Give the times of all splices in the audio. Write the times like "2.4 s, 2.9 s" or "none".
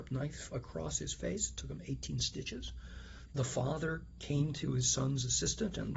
none